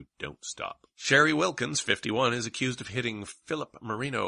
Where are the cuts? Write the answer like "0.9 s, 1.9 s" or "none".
0.9 s